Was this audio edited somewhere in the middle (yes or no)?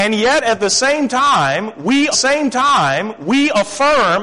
yes